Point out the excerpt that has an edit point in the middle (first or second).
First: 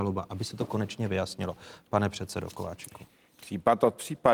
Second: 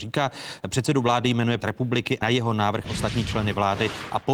second